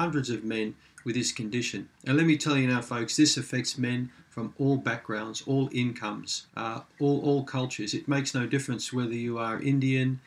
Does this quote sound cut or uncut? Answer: cut